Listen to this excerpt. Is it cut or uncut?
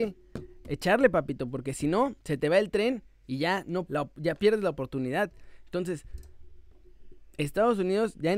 cut